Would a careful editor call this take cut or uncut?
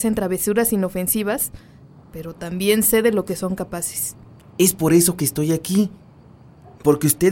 uncut